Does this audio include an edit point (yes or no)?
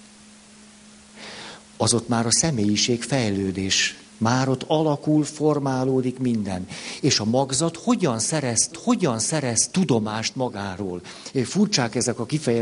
yes